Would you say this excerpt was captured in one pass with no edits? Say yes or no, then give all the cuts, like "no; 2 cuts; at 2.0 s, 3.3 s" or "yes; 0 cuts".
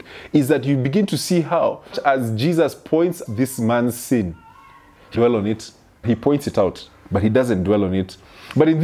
no; 4 cuts; at 1.9 s, 3.2 s, 5.1 s, 6.0 s